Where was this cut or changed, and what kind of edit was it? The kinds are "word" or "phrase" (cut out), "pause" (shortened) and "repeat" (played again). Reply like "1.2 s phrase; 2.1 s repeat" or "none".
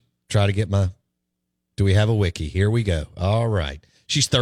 none